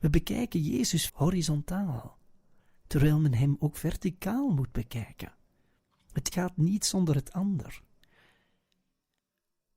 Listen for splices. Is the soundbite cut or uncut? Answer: cut